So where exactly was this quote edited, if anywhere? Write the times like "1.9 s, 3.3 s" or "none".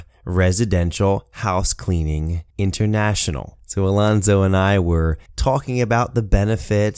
2.5 s, 5.3 s